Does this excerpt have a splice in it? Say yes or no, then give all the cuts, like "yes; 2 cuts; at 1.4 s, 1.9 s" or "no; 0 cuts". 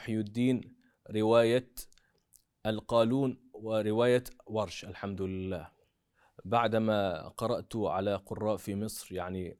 no; 0 cuts